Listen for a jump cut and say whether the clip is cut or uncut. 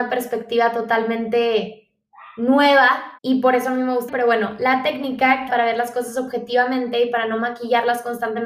cut